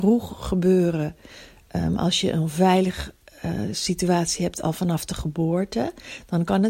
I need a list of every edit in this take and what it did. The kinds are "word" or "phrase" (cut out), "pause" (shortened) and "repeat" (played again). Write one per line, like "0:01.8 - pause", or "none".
none